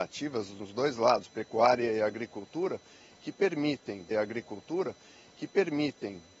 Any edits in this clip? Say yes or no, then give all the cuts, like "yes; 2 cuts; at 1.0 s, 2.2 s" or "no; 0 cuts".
yes; 1 cut; at 4.1 s